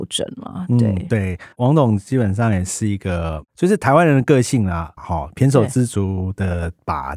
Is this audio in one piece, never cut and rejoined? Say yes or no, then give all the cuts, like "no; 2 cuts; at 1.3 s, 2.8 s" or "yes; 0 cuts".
no; 2 cuts; at 1.5 s, 5.0 s